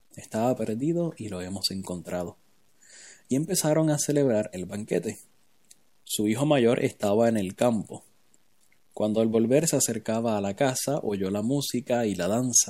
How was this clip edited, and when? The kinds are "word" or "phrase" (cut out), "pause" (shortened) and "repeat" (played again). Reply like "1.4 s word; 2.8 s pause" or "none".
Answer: none